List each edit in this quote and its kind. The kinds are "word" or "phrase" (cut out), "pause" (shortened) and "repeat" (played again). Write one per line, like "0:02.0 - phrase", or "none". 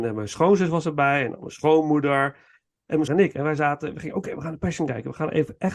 0:03.1 - word